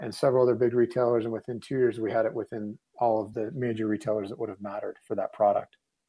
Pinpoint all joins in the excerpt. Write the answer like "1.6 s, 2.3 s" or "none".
none